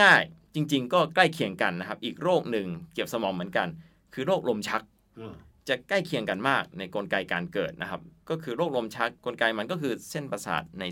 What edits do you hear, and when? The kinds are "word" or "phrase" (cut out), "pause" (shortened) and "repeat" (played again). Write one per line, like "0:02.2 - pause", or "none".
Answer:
0:09.2 - pause